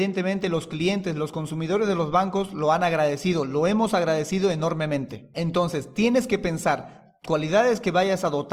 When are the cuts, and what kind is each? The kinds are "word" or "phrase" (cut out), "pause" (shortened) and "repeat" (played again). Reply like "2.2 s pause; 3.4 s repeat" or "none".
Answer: 7.3 s word